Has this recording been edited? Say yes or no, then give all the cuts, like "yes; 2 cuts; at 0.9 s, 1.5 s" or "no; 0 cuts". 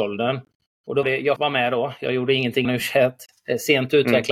yes; 3 cuts; at 1.0 s, 1.4 s, 2.6 s